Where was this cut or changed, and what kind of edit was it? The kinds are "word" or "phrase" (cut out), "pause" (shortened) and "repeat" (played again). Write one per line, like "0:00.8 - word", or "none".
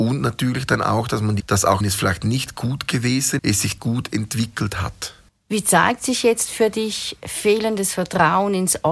0:01.4 - phrase
0:01.8 - word
0:03.4 - word
0:03.8 - phrase
0:05.3 - pause